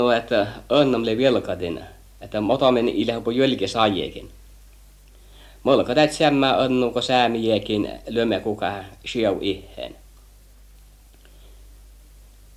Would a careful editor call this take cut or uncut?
uncut